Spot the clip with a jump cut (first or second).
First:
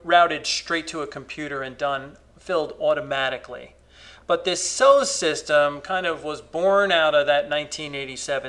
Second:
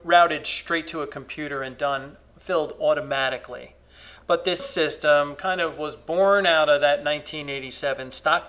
second